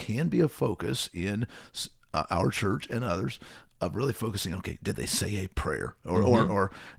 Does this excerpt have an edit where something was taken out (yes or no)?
no